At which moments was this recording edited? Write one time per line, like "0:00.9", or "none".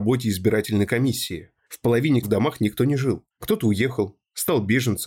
0:02.2
0:03.3

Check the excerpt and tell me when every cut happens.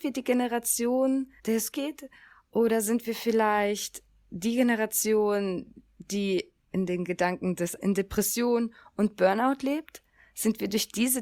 0:01.4
0:01.7
0:06.7
0:07.8

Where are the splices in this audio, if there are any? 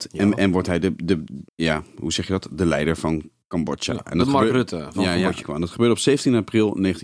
0:01.5
0:05.4

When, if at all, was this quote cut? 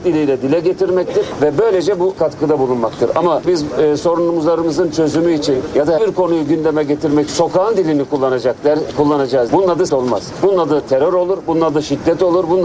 0:02.2
0:03.4
0:06.0
0:07.3
0:09.5
0:09.9

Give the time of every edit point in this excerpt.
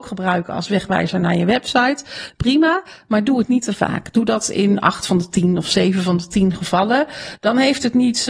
none

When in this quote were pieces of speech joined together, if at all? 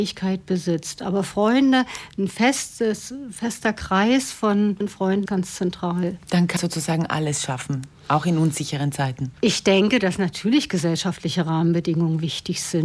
0:04.8
0:05.3
0:06.6
0:09.3

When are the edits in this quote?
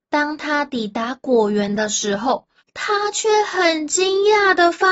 0:02.6

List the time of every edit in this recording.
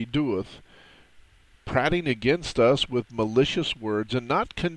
none

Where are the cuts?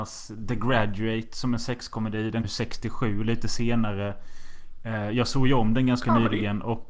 0:02.4

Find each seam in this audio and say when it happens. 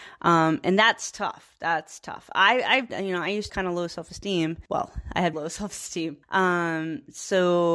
0:02.9
0:03.5
0:04.7
0:05.3
0:06.2

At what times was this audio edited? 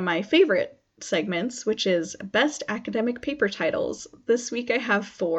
none

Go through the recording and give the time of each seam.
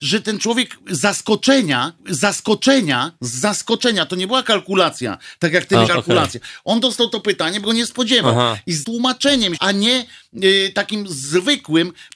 0:02.0
0:05.9
0:07.6
0:08.8
0:09.6

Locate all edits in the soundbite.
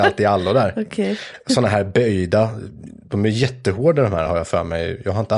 none

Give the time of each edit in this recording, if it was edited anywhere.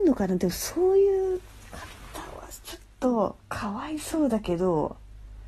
0:03.4

